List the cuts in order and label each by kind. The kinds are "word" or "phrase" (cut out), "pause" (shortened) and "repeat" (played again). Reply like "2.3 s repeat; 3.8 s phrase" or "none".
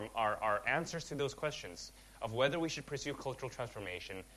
none